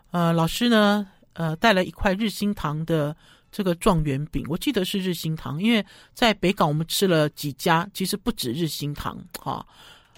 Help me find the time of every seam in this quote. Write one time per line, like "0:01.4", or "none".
none